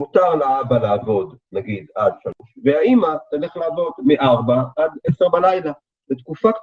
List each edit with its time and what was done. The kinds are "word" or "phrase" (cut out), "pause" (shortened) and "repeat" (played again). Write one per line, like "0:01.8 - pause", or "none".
none